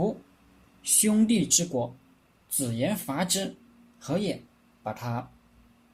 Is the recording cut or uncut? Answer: cut